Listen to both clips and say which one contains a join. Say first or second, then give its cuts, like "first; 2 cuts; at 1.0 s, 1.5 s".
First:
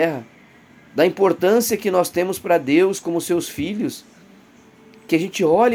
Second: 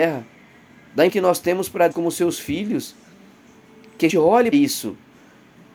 second; 4 cuts; at 1.1 s, 1.9 s, 4.1 s, 4.5 s